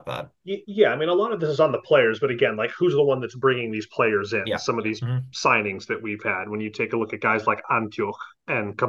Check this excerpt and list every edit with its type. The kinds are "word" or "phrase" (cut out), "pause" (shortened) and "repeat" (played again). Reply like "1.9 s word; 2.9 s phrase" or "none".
none